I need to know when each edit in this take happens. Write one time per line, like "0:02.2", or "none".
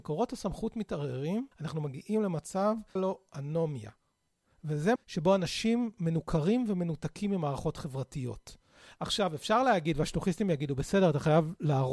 0:01.5
0:03.0
0:05.0